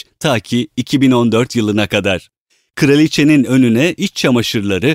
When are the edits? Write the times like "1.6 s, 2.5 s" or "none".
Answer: none